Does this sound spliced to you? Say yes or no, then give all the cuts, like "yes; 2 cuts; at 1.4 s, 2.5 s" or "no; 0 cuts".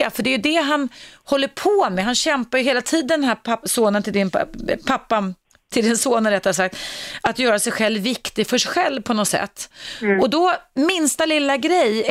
no; 0 cuts